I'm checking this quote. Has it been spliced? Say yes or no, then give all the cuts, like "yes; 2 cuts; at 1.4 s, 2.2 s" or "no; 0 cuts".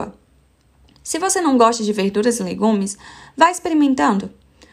no; 0 cuts